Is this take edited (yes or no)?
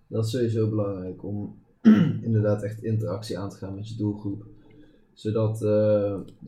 no